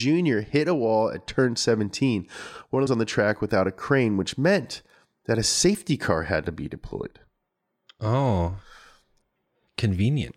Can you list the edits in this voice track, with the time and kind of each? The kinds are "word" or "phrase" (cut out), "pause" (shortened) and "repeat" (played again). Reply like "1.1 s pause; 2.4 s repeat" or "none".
2.9 s phrase